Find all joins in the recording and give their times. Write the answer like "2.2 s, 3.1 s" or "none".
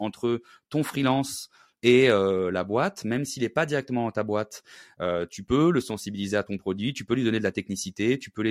none